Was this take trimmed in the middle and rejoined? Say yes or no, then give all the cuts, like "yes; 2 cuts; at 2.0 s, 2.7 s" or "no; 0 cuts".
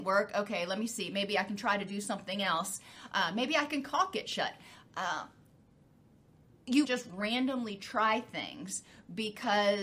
yes; 1 cut; at 6.8 s